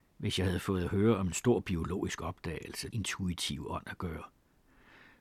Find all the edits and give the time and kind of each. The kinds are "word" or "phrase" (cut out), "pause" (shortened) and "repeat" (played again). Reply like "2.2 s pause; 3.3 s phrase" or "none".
2.9 s phrase